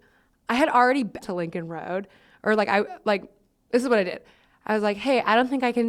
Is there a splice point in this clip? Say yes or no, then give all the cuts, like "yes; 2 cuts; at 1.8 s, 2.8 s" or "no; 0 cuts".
yes; 1 cut; at 1.2 s